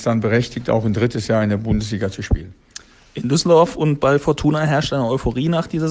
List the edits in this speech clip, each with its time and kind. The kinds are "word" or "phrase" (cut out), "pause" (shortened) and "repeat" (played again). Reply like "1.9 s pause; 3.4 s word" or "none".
none